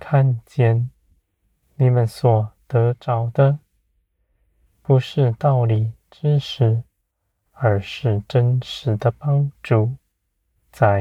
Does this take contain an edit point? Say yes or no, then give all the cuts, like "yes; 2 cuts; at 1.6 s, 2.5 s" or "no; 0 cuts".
no; 0 cuts